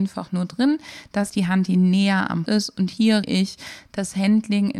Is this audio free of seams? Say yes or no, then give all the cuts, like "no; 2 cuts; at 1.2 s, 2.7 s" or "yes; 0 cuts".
no; 3 cuts; at 1.3 s, 2.5 s, 3.2 s